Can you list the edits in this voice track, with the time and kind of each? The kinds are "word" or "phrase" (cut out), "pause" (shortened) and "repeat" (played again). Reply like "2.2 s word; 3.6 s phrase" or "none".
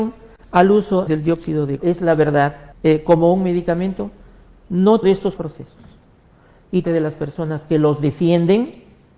1.1 s word; 1.8 s word; 2.7 s pause; 5.0 s phrase; 5.4 s word; 6.8 s phrase